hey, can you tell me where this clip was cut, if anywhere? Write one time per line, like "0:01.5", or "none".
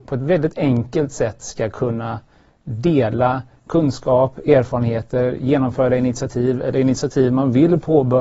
none